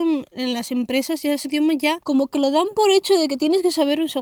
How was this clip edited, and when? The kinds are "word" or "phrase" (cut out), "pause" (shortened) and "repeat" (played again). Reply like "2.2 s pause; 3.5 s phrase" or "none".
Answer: 1.4 s word; 2.0 s pause